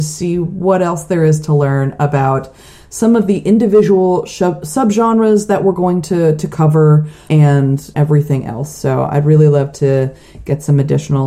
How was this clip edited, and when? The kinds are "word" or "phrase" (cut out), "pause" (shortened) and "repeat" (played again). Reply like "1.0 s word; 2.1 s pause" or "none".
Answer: none